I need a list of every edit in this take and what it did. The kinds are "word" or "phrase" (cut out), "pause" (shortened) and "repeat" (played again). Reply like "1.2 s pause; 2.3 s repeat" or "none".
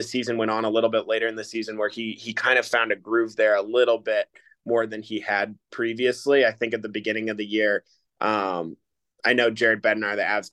none